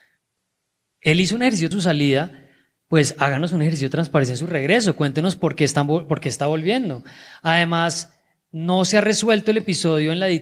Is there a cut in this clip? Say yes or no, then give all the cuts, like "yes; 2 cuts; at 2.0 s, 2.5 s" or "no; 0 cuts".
yes; 1 cut; at 1.7 s